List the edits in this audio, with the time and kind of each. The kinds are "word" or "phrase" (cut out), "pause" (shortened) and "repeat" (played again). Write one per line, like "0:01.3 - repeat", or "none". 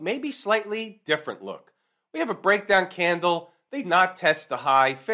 0:03.8 - word